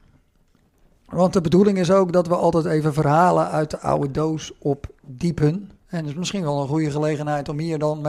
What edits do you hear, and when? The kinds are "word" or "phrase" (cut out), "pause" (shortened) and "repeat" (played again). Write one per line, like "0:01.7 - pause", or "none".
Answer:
0:05.8 - pause